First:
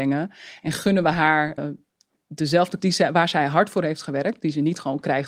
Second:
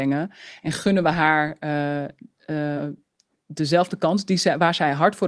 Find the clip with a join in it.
first; 2 cuts; at 1.6 s, 2.8 s

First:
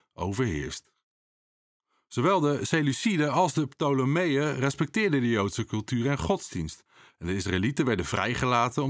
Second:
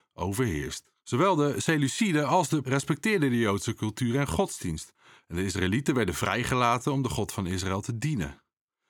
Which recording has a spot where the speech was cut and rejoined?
second; 2 cuts; at 1.0 s, 2.6 s

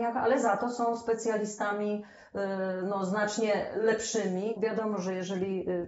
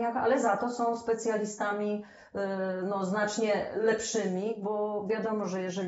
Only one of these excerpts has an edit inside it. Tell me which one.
first; 1 cut; at 4.6 s

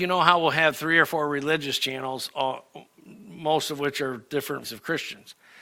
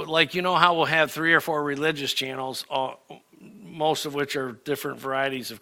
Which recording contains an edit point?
first; 1 cut; at 4.6 s

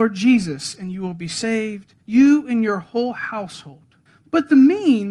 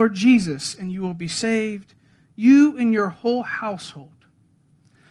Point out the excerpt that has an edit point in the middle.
first; 2 cuts; at 2.0 s, 4.1 s

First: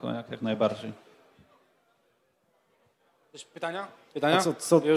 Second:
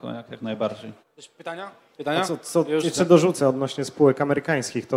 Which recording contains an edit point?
second; 1 cut; at 1.0 s

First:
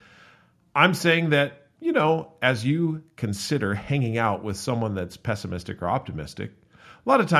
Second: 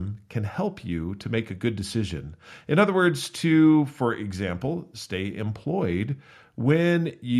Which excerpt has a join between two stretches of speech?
first; 1 cut; at 1.7 s

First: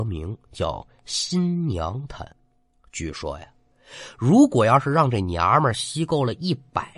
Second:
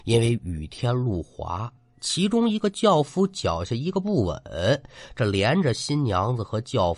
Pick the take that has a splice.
first; 1 cut; at 2.3 s

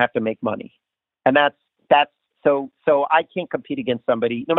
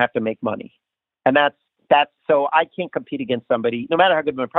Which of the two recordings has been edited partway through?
second; 1 cut; at 2.2 s

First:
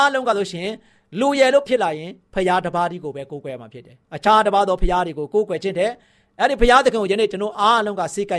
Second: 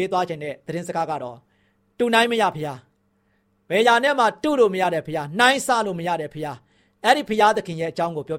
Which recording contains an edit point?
first; 1 cut; at 4.0 s

